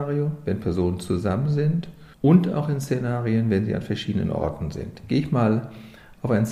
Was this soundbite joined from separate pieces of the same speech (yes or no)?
yes